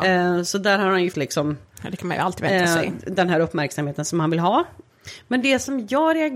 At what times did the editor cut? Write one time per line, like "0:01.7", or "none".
0:01.1

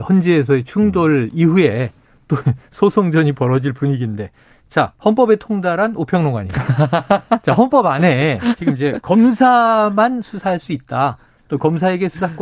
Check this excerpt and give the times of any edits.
none

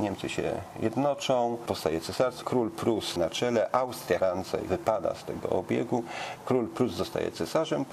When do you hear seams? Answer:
0:02.4
0:03.2
0:04.2
0:04.7

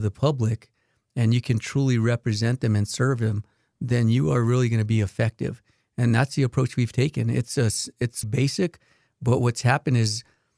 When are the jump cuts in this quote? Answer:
0:08.2

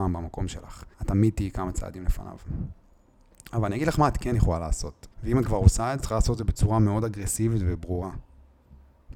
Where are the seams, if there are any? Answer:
0:00.9
0:05.1
0:06.0

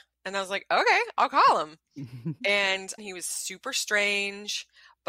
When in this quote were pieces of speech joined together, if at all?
0:03.0

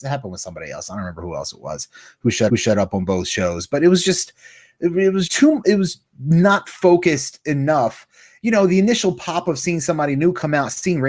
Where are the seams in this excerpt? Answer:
0:02.5
0:05.3

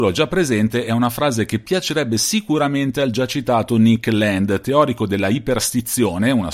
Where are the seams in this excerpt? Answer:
none

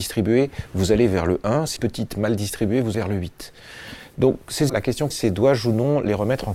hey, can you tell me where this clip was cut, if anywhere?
0:01.8
0:02.9
0:04.7
0:05.1

